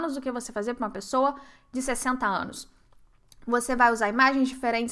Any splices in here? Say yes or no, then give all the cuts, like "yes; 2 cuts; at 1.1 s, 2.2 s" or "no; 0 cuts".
no; 0 cuts